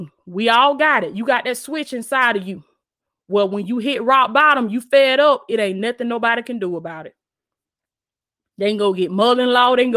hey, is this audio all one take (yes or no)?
yes